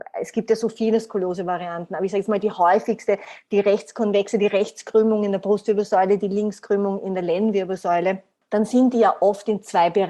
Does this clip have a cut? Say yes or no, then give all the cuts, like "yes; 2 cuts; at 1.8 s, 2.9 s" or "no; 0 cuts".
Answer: no; 0 cuts